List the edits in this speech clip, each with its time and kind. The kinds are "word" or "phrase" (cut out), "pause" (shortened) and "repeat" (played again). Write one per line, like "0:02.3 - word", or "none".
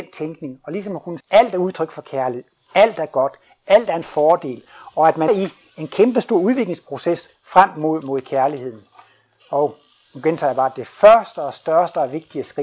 0:01.2 - word
0:05.3 - word
0:08.0 - word